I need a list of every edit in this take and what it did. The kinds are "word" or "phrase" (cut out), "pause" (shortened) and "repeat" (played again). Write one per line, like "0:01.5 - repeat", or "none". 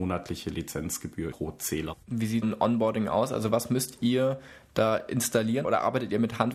0:01.3 - word
0:02.0 - pause
0:02.4 - word
0:05.6 - word